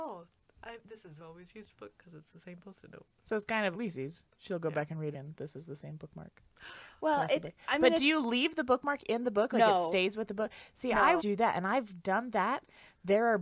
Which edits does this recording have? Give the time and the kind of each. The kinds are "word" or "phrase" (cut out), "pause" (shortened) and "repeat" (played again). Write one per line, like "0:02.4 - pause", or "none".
0:01.2 - phrase
0:01.7 - phrase
0:03.7 - word
0:05.1 - phrase
0:11.2 - word